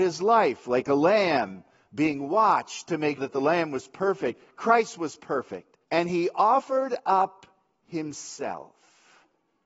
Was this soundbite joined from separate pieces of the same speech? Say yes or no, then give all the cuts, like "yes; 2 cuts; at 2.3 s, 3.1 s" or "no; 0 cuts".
yes; 2 cuts; at 3.2 s, 5.8 s